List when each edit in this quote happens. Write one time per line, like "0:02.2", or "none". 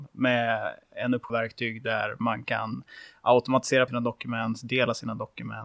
0:01.3
0:03.9